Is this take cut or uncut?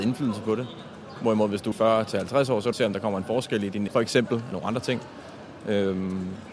cut